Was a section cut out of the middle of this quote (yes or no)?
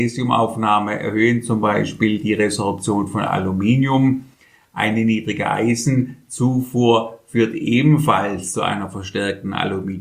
no